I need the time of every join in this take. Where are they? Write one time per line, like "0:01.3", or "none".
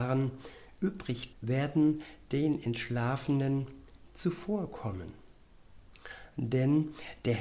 0:01.3
0:04.1